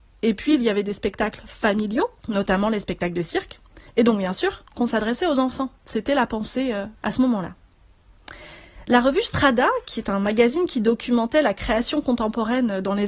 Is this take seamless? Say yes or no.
no